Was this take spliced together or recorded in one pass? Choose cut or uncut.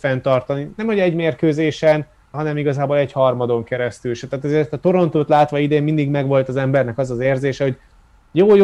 cut